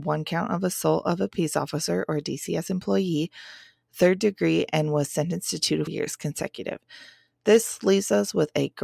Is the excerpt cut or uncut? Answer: cut